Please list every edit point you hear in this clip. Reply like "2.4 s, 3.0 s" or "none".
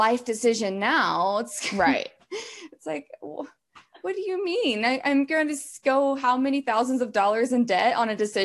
none